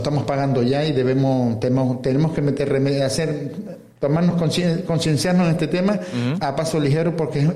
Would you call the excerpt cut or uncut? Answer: uncut